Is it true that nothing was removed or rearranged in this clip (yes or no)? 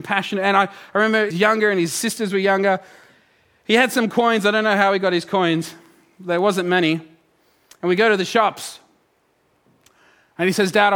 no